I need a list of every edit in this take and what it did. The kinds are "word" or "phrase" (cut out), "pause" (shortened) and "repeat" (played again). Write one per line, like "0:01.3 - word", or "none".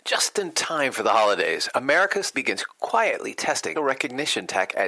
0:02.3 - word
0:03.7 - word